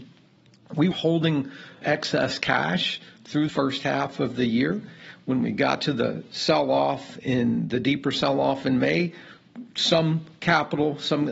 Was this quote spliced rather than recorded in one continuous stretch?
yes; 3 cuts; at 0.9 s, 1.8 s, 3.5 s

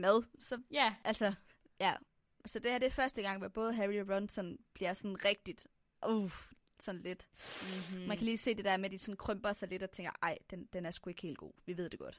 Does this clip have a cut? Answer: no; 0 cuts

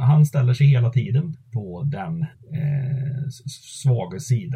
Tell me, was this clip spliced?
yes; 2 cuts; at 1.3 s, 2.3 s

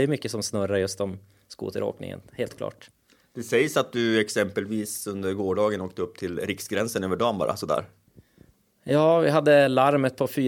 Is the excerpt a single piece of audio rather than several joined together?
yes; 0 cuts

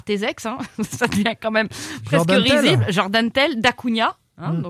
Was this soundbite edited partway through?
no; 0 cuts

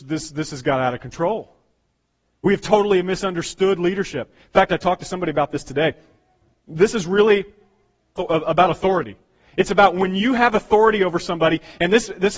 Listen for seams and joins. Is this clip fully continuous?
no; 1 cut; at 8.2 s

